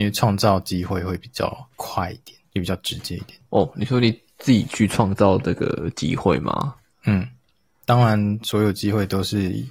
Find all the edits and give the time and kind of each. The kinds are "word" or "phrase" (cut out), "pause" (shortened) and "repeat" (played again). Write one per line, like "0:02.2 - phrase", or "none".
none